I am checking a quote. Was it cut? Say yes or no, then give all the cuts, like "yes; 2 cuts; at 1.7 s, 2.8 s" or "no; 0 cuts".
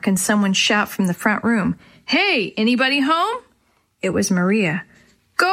no; 0 cuts